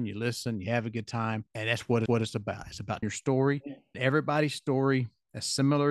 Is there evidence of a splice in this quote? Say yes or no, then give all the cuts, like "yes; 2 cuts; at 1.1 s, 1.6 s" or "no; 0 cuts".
yes; 4 cuts; at 1.5 s, 2.1 s, 3.0 s, 3.9 s